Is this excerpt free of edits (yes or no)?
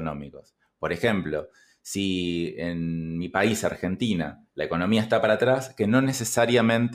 yes